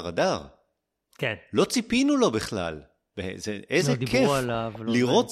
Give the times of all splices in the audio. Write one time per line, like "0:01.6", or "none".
none